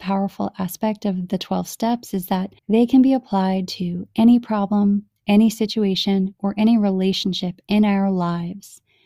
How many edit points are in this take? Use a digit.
1